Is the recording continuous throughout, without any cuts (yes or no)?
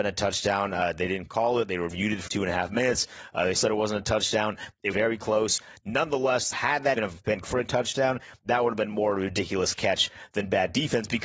no